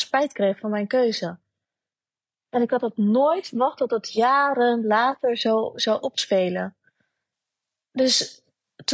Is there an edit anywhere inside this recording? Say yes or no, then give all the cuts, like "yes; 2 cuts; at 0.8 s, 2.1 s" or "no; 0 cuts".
no; 0 cuts